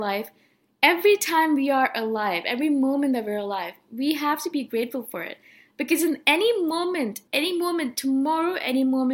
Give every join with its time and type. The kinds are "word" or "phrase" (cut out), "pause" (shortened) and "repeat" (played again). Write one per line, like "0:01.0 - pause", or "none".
0:07.3 - pause